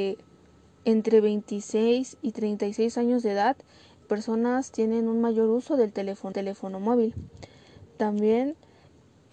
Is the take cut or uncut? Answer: cut